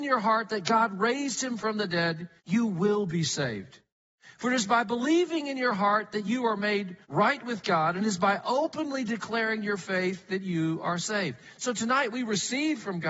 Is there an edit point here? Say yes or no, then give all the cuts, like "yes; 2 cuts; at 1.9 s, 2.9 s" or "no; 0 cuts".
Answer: yes; 2 cuts; at 2.4 s, 7.0 s